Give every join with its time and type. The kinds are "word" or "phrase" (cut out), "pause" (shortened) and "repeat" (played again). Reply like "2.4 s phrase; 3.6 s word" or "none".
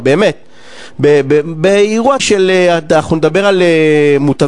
2.2 s word